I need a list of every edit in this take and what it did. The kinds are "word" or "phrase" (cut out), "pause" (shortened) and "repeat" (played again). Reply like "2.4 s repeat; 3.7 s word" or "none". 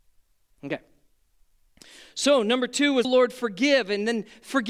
3.0 s word